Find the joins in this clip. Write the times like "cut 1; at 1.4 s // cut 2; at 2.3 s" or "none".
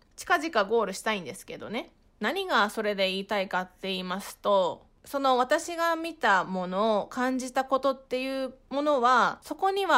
none